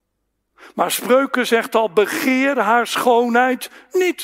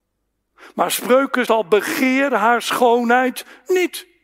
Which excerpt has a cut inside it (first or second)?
second